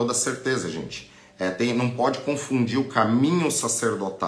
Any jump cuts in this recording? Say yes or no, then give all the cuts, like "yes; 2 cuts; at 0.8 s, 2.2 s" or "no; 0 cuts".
no; 0 cuts